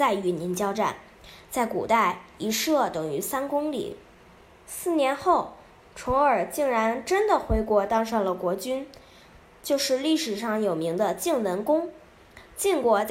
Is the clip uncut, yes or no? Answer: yes